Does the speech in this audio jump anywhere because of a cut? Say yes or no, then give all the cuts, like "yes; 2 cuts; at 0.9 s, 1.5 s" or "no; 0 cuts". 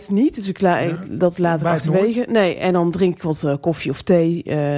no; 0 cuts